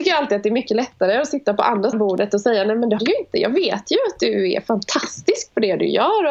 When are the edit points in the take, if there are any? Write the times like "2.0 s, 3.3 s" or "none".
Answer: 1.9 s, 3.0 s